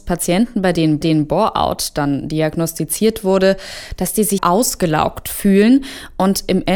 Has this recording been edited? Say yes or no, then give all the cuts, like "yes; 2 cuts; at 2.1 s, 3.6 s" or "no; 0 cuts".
yes; 2 cuts; at 1.0 s, 4.4 s